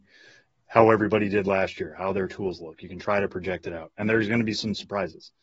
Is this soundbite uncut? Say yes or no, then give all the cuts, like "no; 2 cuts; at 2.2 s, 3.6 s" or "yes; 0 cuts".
yes; 0 cuts